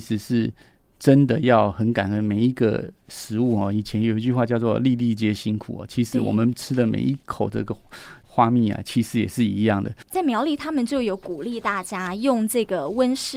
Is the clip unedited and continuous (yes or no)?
no